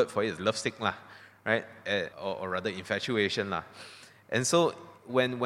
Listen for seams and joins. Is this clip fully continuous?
no; 1 cut; at 2.1 s

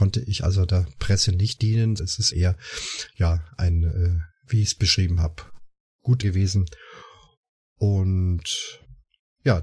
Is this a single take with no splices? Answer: no; 4 cuts; at 1.6 s, 2.0 s, 2.3 s, 6.2 s

